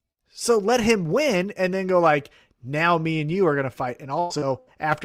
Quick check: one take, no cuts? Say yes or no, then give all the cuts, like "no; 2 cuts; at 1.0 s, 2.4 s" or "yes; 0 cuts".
yes; 0 cuts